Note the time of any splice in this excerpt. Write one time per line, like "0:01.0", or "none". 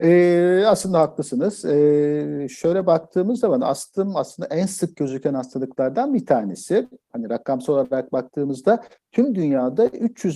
none